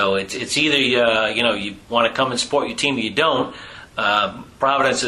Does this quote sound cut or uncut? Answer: uncut